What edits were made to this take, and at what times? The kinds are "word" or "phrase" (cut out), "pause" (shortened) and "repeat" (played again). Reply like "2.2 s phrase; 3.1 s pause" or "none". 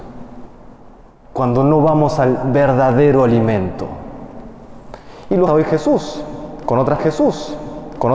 5.5 s word; 7.0 s repeat